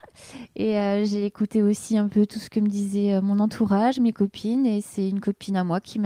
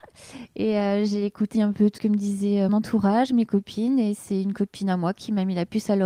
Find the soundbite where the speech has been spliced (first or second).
second